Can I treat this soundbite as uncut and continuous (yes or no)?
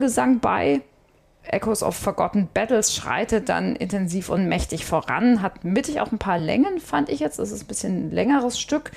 yes